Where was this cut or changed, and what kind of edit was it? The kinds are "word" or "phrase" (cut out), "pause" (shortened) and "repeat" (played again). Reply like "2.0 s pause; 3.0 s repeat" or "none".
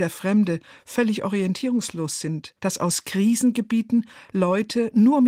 2.6 s pause